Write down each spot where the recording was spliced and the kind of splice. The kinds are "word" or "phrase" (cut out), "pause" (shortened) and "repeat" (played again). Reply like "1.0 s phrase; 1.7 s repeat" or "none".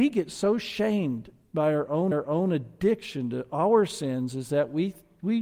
2.1 s repeat